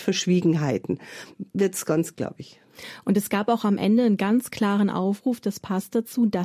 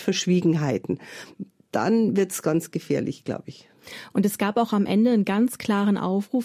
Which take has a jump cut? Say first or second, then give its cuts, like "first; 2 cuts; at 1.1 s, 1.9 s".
first; 2 cuts; at 1.5 s, 2.1 s